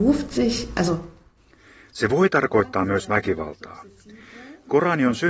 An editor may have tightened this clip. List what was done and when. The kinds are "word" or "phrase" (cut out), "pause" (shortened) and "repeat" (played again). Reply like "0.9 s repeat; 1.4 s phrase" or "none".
none